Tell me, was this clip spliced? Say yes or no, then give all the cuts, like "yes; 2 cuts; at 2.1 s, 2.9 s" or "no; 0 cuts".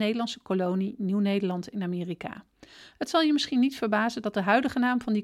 no; 0 cuts